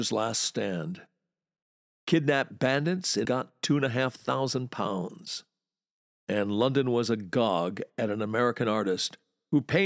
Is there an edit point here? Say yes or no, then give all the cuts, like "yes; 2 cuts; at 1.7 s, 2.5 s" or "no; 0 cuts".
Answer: yes; 1 cut; at 3.2 s